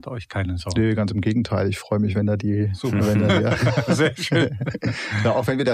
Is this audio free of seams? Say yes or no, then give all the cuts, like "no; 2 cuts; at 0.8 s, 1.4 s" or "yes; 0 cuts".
yes; 0 cuts